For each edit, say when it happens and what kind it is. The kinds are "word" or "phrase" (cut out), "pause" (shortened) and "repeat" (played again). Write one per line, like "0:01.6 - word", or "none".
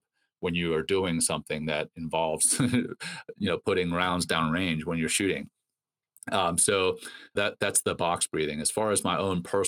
0:07.4 - word

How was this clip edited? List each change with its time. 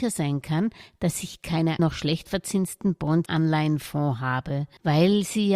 0:01.8 - word
0:03.2 - word

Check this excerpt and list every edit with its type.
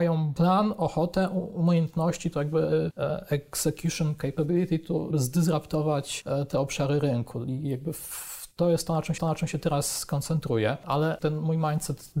0:05.1 - word
0:09.2 - repeat
0:11.2 - word

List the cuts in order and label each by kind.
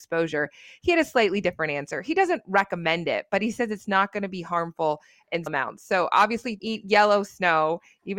0:05.5 - word
0:06.6 - word

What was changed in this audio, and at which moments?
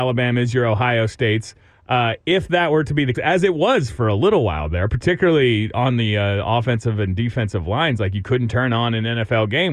0:03.1 - word

